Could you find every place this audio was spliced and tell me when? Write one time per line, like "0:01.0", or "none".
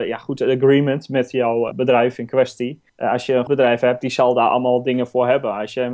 0:01.7
0:02.9
0:03.5